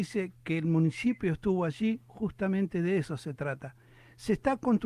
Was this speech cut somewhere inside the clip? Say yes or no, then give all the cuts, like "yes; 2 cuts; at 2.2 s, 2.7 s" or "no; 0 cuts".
yes; 1 cut; at 2.1 s